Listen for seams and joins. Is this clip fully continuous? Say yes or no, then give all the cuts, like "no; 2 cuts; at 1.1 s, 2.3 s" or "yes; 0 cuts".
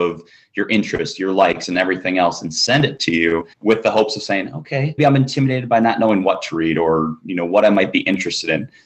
no; 2 cuts; at 3.5 s, 5.0 s